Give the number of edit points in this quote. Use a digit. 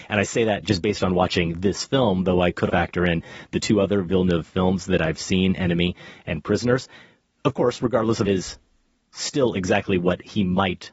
2